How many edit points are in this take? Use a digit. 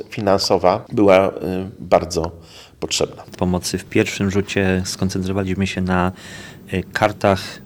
1